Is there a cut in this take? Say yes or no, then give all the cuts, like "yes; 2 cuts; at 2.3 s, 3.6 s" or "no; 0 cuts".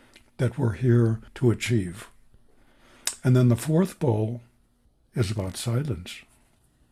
yes; 2 cuts; at 1.3 s, 4.9 s